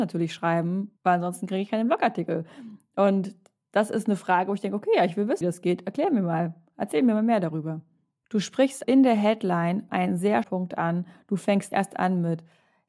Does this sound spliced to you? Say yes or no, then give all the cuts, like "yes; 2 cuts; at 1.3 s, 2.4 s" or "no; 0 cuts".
yes; 6 cuts; at 1.0 s, 5.4 s, 8.8 s, 9.9 s, 10.4 s, 11.7 s